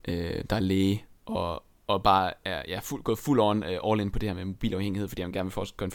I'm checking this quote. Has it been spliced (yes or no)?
no